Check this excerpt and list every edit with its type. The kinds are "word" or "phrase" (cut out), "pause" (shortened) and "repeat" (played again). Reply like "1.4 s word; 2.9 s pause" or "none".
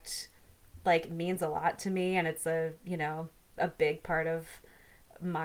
none